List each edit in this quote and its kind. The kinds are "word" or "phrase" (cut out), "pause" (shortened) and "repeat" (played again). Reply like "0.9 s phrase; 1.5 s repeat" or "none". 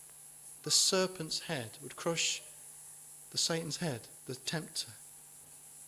none